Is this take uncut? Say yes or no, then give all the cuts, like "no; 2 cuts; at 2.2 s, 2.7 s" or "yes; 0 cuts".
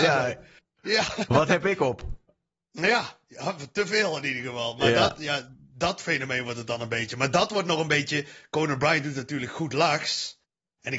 yes; 0 cuts